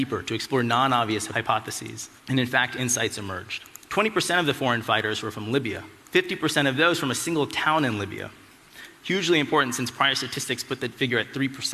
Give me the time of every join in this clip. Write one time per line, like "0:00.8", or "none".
0:02.2
0:03.8
0:06.0